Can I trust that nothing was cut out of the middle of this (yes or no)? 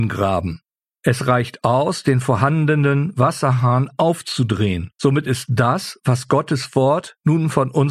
no